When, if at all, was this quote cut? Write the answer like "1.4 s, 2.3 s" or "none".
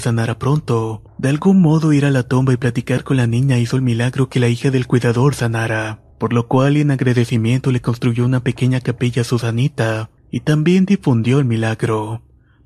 1.1 s, 6.1 s, 10.2 s